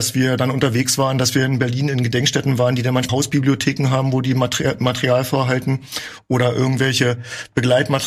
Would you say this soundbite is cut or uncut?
cut